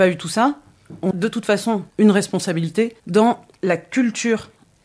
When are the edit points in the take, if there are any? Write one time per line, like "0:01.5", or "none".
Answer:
0:01.1
0:01.9
0:03.0

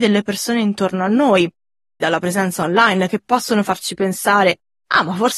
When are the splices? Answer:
0:02.0

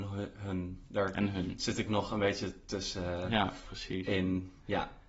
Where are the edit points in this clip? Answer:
none

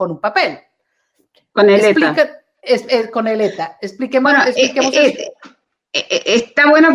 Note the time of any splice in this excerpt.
none

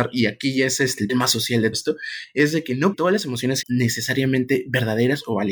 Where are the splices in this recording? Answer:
0:01.1
0:01.7
0:02.9
0:03.6

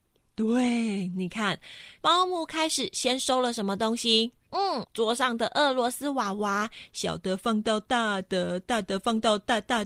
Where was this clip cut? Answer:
0:04.5

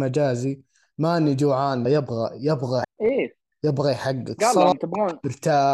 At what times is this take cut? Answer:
0:01.9
0:02.8

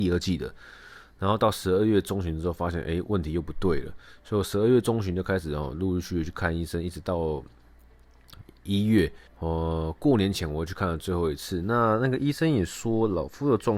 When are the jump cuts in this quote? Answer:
0:09.3

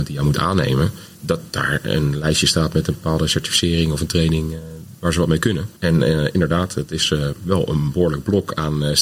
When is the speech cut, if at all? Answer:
0:01.1
0:05.8

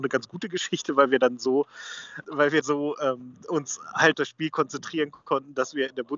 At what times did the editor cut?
0:02.2
0:02.6
0:04.1

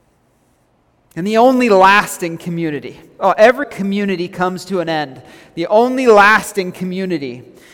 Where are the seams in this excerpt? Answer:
0:03.6

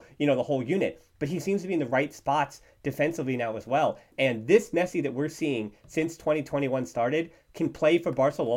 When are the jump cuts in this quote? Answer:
none

